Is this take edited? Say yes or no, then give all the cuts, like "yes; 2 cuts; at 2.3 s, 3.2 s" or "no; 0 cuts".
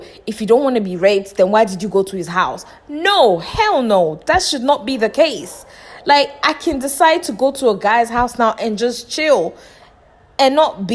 no; 0 cuts